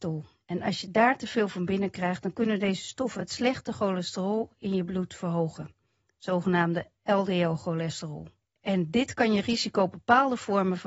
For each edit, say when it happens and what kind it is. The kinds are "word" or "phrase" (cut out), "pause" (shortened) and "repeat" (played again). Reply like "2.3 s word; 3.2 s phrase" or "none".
none